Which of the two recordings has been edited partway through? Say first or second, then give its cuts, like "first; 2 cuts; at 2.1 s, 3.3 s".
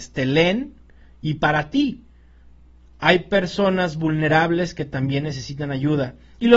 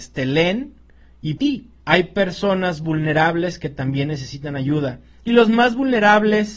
second; 2 cuts; at 1.4 s, 1.8 s